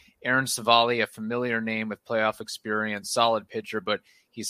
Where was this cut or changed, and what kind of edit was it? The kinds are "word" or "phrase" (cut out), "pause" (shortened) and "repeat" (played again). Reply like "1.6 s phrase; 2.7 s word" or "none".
none